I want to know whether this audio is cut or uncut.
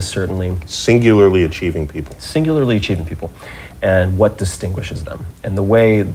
uncut